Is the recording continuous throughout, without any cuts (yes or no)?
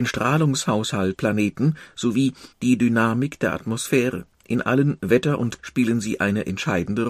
no